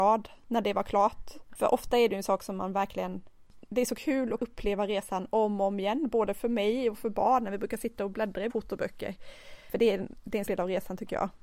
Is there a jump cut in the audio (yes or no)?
yes